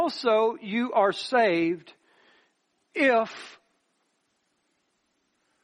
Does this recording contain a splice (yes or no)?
no